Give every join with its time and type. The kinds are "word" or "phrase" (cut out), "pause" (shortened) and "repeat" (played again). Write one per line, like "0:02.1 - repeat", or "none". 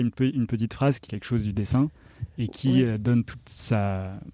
0:01.1 - word

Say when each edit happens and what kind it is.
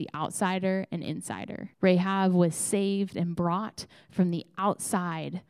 0:01.7 - pause

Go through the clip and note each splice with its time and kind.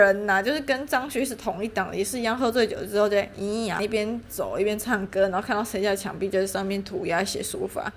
0:03.8 - word

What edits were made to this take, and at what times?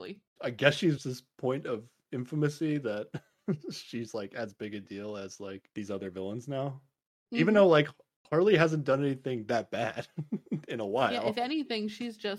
0:01.0 - word

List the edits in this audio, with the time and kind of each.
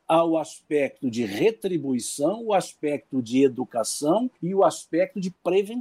0:04.4 - pause

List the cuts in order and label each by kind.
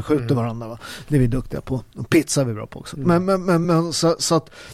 none

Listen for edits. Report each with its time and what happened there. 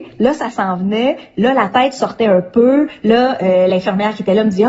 none

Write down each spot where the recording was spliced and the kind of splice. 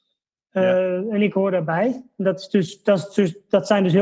none

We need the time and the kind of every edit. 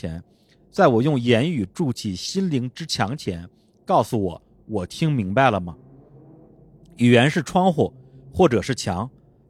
none

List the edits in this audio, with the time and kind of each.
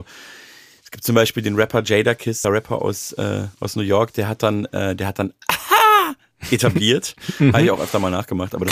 0:02.4 - phrase
0:03.5 - pause

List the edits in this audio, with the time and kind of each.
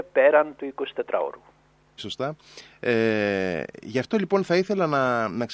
0:02.0 - word

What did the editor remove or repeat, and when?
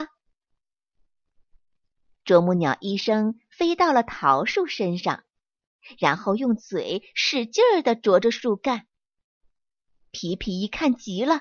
none

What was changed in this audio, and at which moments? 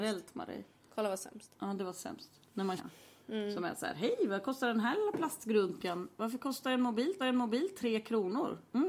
0:02.8 - phrase
0:07.2 - repeat

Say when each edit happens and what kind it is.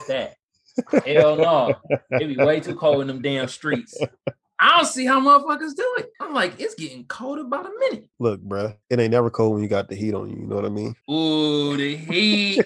0:06.1 - pause
0:08.1 - pause
0:08.8 - pause
0:11.0 - pause

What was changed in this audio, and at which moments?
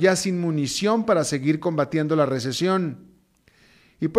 none

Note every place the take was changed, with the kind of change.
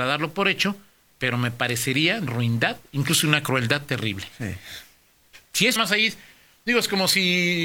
0:02.3 - word
0:05.8 - phrase

